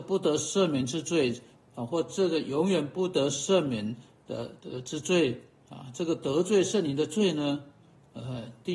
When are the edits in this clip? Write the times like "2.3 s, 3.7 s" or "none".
none

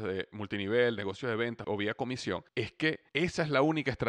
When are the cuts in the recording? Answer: 1.6 s, 2.5 s, 3.1 s

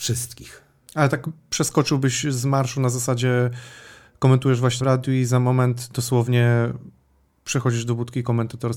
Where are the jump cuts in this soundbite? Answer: 4.8 s

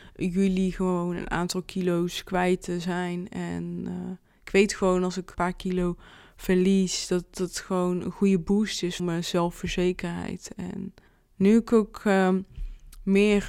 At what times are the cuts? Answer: 5.3 s, 9.0 s, 11.1 s

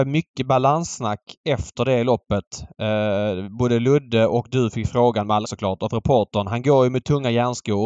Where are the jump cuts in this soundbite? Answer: 5.4 s

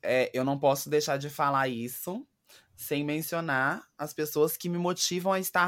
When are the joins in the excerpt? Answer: none

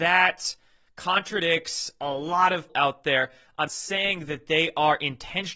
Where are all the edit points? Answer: 2.7 s, 3.7 s

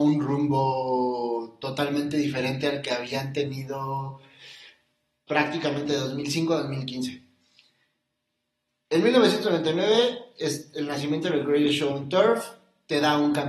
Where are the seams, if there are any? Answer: none

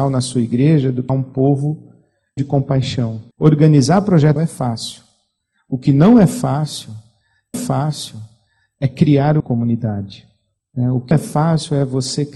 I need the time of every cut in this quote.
1.1 s, 2.4 s, 3.3 s, 4.4 s, 7.5 s, 9.4 s, 11.1 s

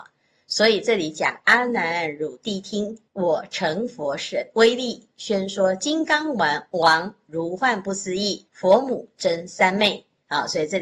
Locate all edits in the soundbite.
3.1 s, 8.5 s

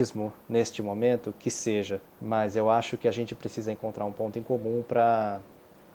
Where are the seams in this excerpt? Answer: 2.0 s

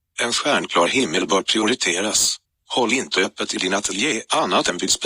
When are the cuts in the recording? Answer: 2.4 s

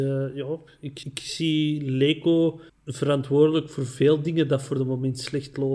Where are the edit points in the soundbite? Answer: 1.0 s, 2.7 s

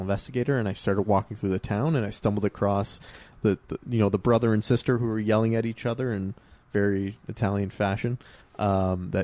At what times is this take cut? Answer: none

